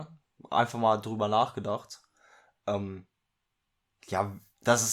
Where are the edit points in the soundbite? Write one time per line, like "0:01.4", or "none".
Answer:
none